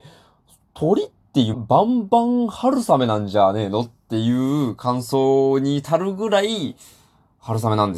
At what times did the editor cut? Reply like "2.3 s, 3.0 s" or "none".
1.5 s